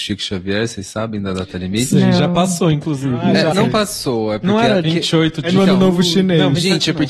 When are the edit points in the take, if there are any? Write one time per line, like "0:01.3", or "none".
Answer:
0:03.5
0:04.8